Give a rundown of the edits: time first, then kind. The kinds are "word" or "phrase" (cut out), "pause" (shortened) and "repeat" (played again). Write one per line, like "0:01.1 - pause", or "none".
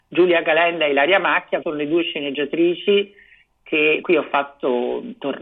0:01.6 - word
0:04.0 - word